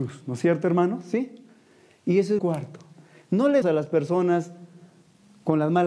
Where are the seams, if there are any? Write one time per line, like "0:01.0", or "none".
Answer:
0:02.4
0:03.6